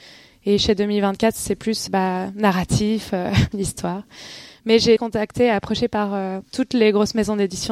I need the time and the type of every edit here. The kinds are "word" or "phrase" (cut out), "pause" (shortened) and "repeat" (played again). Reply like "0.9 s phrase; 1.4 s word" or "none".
1.9 s word; 3.5 s word; 5.0 s word; 6.4 s pause